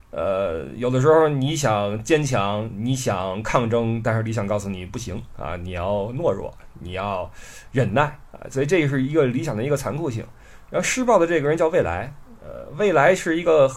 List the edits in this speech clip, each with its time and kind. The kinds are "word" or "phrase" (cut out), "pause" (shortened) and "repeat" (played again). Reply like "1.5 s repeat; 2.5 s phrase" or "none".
none